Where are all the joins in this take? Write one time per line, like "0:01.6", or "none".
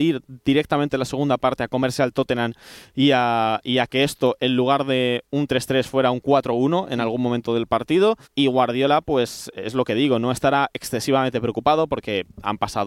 0:08.2